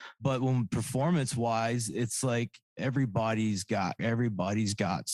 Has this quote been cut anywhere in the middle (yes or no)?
yes